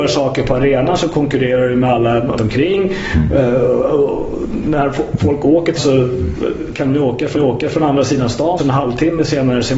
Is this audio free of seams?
no; 4 cuts; at 2.4 s, 5.8 s, 7.3 s, 8.6 s

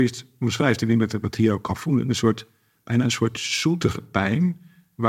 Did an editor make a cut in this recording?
no; 0 cuts

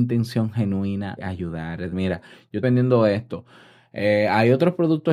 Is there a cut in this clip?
yes; 3 cuts; at 1.2 s, 1.9 s, 2.6 s

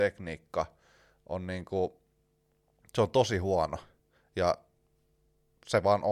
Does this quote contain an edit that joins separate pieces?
no; 0 cuts

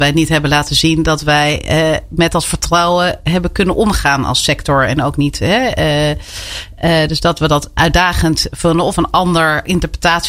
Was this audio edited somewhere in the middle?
no; 0 cuts

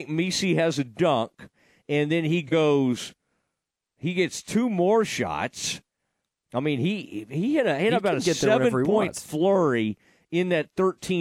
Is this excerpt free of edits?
yes; 0 cuts

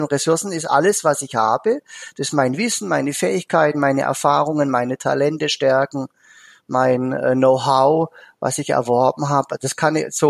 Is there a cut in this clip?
no; 0 cuts

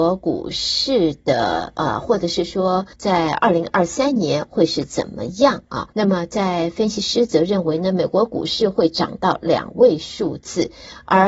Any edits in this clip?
yes; 2 cuts; at 2.9 s, 5.9 s

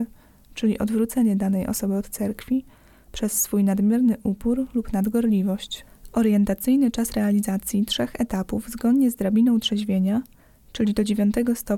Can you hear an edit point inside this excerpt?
no; 0 cuts

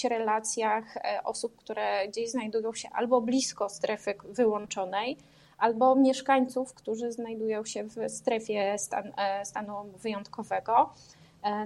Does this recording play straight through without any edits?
yes; 0 cuts

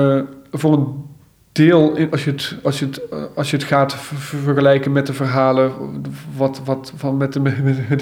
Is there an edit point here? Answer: no; 0 cuts

